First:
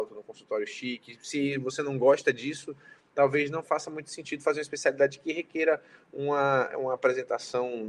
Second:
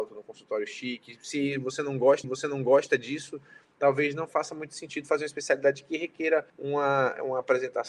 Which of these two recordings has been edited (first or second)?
second